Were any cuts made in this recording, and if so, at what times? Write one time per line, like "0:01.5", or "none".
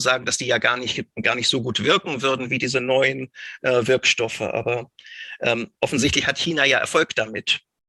0:05.8